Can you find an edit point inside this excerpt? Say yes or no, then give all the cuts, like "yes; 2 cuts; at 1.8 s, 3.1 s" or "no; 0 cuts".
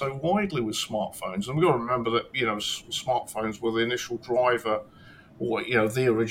no; 0 cuts